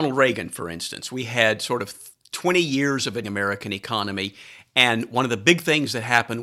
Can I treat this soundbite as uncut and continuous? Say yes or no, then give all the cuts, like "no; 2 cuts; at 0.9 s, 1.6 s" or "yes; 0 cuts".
no; 1 cut; at 3.2 s